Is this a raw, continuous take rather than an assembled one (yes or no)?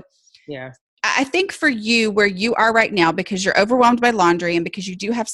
yes